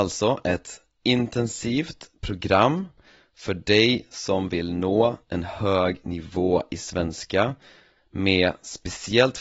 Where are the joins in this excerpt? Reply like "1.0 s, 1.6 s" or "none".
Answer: none